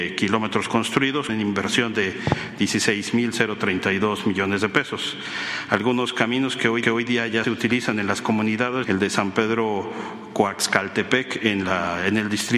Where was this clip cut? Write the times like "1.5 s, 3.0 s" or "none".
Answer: 1.3 s, 6.8 s, 7.4 s, 8.8 s

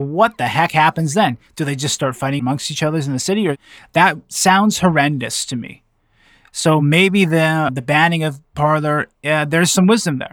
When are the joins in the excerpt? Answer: none

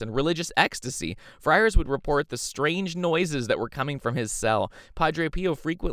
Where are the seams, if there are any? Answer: none

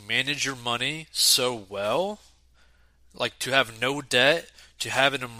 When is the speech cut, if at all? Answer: none

